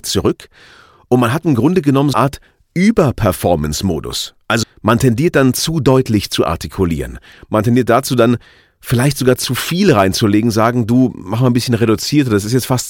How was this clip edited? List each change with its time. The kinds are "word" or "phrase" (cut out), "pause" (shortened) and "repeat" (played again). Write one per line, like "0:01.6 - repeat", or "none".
0:02.1 - word
0:04.6 - word